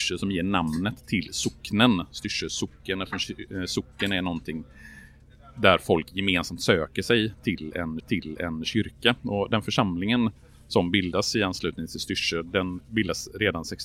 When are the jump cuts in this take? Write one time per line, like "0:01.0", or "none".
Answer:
0:08.0

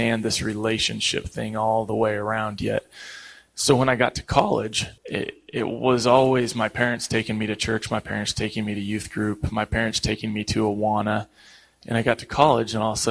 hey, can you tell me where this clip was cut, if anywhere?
0:05.0

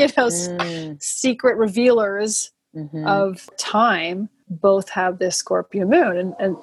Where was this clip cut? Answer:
0:03.5

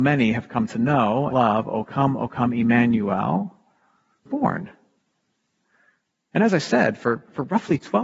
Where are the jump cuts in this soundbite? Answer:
0:01.3
0:04.3

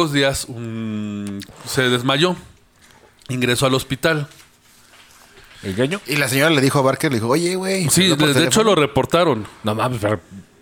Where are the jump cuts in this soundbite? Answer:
none

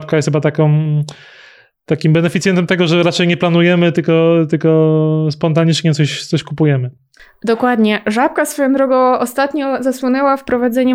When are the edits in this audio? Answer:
none

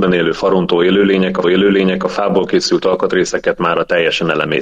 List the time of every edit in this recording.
0:01.4

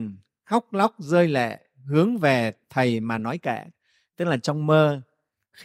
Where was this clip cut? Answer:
none

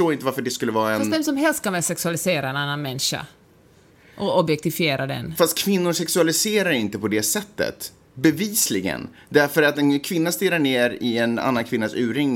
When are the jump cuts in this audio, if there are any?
none

